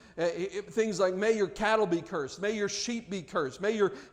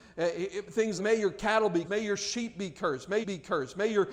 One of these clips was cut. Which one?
second; 3 cuts; at 1.0 s, 1.8 s, 3.2 s

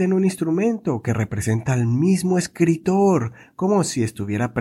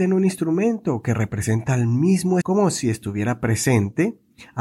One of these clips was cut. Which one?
second; 1 cut; at 2.4 s

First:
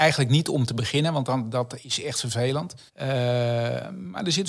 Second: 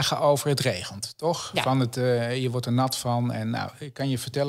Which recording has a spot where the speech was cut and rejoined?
first; 1 cut; at 2.9 s

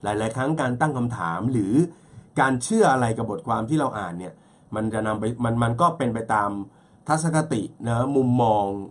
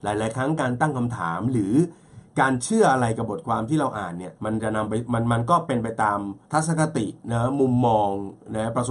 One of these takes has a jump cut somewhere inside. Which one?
second; 2 cuts; at 4.4 s, 6.4 s

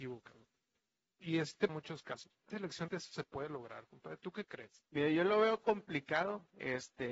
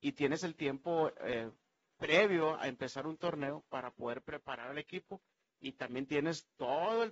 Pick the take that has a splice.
first; 3 cuts; at 1.7 s, 2.5 s, 2.9 s

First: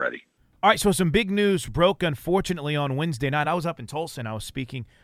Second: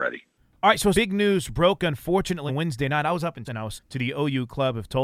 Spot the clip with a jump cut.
second; 4 cuts; at 0.9 s, 2.5 s, 3.4 s, 3.7 s

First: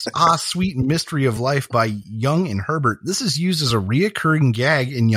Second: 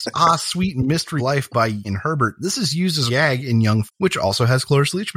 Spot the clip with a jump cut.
second; 4 cuts; at 1.2 s, 1.8 s, 3.1 s, 3.9 s

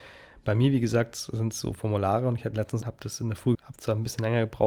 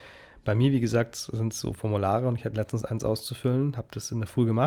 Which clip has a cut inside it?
first; 2 cuts; at 2.8 s, 3.5 s

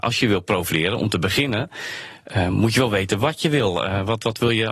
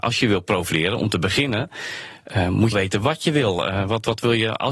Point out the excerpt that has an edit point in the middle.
second; 1 cut; at 2.7 s

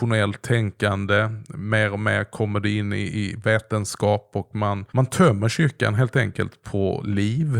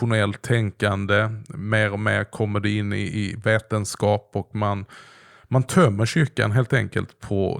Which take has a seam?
first; 1 cut; at 4.9 s

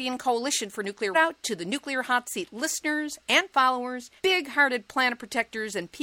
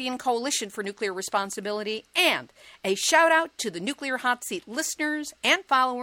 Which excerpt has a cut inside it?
first; 2 cuts; at 1.1 s, 4.2 s

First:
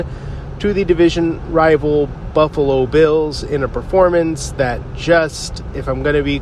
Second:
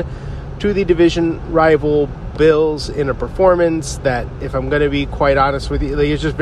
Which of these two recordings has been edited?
second; 2 cuts; at 2.3 s, 4.4 s

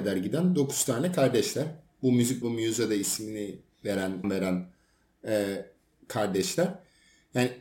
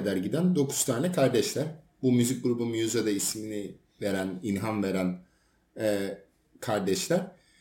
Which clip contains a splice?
first; 2 cuts; at 2.4 s, 4.2 s

